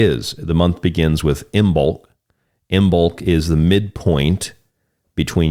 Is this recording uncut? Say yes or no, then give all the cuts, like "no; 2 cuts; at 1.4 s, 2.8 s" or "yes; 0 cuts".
yes; 0 cuts